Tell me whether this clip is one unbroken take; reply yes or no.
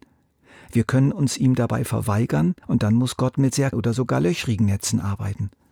no